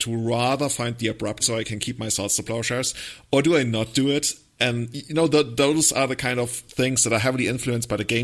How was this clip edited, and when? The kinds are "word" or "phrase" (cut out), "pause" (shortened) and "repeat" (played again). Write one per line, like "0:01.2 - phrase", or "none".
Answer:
0:01.4 - word
0:04.9 - word